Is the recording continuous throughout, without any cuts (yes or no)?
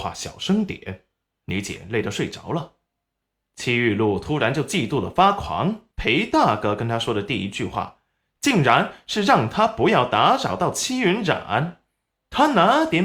no